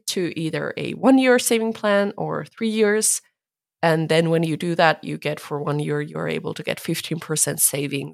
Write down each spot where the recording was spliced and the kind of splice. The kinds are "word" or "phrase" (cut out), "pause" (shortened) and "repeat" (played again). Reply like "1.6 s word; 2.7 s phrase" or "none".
none